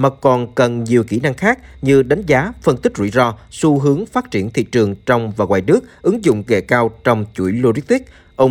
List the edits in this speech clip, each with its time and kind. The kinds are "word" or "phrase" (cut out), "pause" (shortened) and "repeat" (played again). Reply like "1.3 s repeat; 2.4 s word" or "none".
6.5 s word